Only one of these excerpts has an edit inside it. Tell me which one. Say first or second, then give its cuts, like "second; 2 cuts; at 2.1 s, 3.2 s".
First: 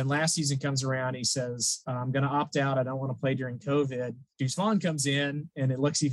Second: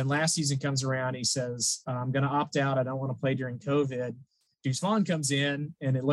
first; 1 cut; at 4.3 s